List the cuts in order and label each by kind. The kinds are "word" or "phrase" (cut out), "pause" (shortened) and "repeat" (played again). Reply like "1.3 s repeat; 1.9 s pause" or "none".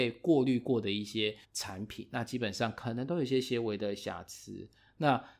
1.4 s pause